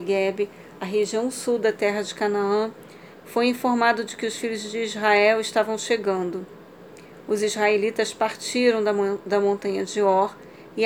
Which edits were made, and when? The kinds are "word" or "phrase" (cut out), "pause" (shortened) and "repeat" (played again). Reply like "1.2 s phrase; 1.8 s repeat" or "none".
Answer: none